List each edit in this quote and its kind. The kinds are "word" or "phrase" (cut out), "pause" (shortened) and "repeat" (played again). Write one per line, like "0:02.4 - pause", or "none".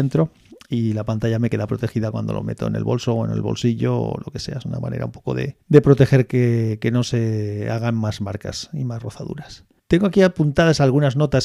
none